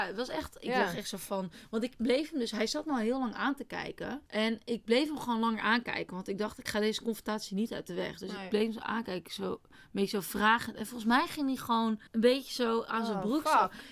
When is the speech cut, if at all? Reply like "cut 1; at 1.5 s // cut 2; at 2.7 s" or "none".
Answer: cut 1; at 4.3 s // cut 2; at 12.1 s